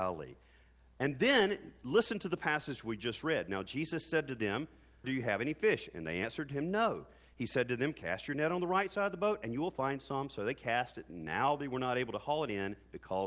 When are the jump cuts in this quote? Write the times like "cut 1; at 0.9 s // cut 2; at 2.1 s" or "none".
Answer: cut 1; at 5.0 s